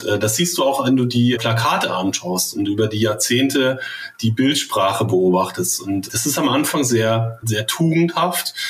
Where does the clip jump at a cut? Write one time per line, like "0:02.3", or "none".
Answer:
0:01.4
0:06.1
0:07.4